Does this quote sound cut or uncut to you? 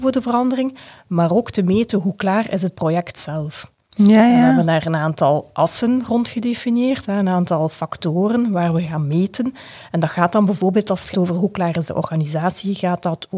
cut